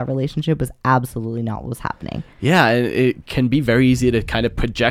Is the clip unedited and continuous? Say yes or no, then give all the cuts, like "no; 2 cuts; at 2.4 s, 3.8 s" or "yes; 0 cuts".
yes; 0 cuts